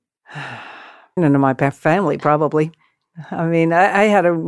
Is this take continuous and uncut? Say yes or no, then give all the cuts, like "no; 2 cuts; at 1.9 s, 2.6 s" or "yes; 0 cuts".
no; 1 cut; at 1.2 s